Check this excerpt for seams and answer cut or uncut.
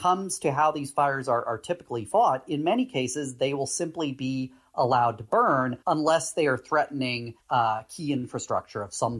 cut